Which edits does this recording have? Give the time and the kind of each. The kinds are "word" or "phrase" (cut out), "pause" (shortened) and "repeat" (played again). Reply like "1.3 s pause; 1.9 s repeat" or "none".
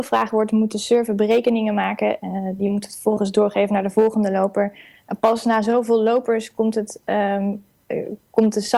none